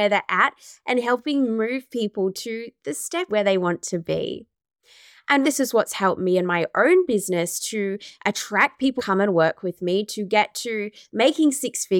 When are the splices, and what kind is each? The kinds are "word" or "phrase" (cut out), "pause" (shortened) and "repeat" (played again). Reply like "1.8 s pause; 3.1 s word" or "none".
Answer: 3.3 s word; 5.4 s word; 9.0 s word